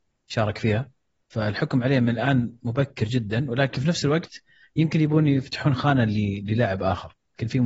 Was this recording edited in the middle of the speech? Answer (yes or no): no